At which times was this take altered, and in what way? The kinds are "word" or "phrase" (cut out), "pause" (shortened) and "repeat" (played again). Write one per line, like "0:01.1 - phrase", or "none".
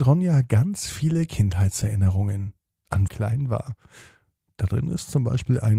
0:03.1 - phrase